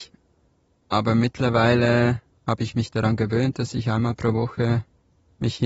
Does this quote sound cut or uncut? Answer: uncut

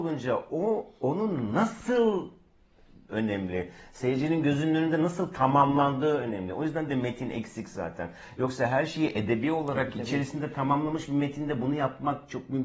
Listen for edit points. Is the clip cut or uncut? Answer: cut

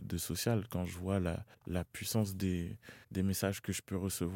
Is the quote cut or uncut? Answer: cut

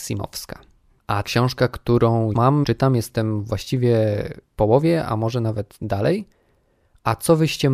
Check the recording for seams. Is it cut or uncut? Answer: cut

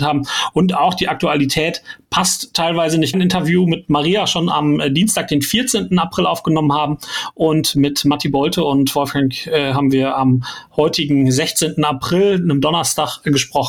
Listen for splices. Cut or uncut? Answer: cut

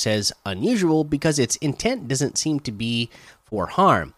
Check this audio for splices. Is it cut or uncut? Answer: uncut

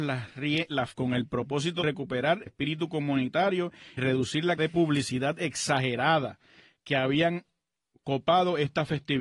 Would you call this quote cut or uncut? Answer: cut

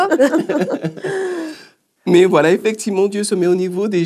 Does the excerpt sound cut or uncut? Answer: uncut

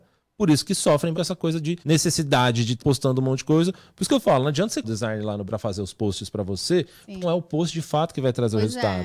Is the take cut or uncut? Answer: cut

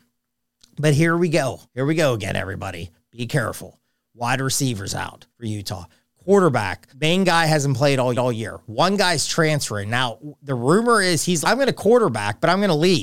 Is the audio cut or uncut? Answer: cut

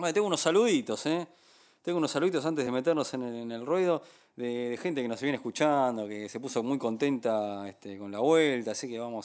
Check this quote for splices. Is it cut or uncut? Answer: uncut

